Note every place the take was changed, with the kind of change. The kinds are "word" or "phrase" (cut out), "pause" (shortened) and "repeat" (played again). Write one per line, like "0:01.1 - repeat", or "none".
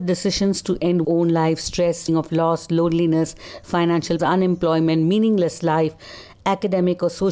0:01.0 - word
0:02.1 - word
0:04.2 - word